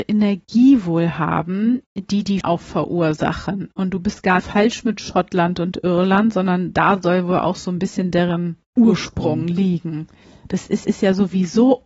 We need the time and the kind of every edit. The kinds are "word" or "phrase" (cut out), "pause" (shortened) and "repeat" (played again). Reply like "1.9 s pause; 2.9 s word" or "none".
2.4 s word; 4.4 s phrase; 8.7 s pause; 10.8 s repeat